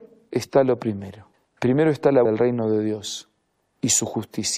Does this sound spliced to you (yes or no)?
yes